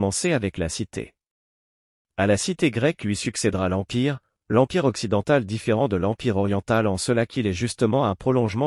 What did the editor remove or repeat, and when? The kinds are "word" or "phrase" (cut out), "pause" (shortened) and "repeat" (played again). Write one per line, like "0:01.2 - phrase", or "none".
none

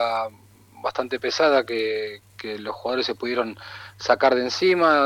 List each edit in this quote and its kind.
none

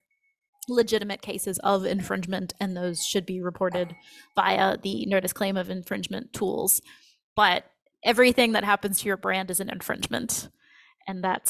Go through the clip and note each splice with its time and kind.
none

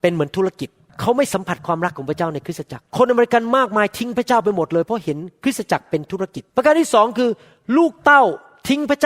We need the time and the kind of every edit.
0:02.9 - pause
0:06.5 - pause

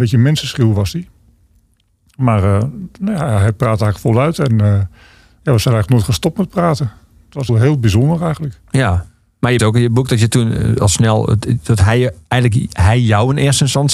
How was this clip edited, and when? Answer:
0:07.5 - word
0:09.6 - word

